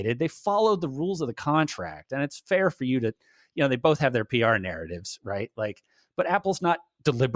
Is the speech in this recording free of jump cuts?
yes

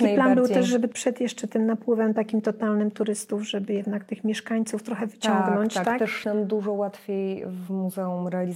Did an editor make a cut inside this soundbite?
yes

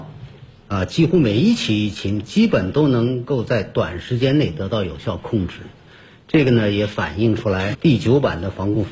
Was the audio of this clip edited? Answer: yes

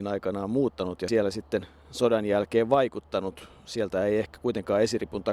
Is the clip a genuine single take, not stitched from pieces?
yes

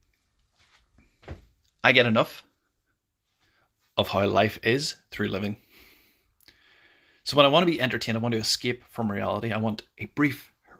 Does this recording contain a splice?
no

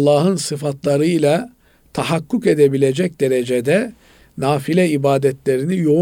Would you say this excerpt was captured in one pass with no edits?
yes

